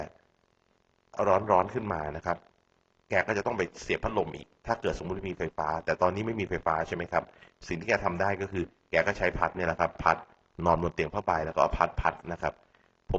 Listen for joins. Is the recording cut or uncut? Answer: uncut